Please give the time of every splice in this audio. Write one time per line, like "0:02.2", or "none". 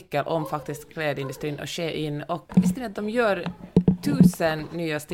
0:02.5

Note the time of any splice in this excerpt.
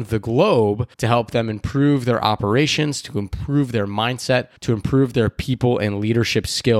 0:00.9
0:04.6

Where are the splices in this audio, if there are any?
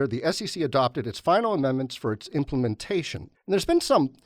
0:03.3

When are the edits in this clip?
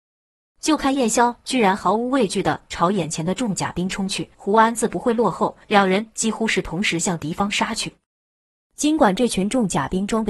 0:04.3
0:05.6

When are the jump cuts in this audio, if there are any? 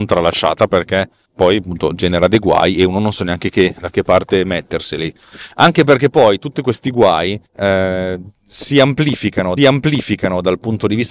0:01.3
0:07.5
0:09.6

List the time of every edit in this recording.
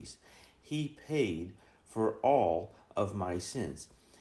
none

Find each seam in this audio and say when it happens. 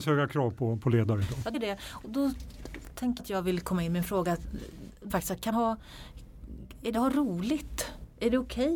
0:01.5
0:02.0
0:03.2
0:05.1
0:05.5
0:06.9

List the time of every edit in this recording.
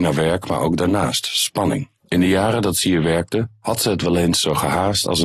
0:02.0

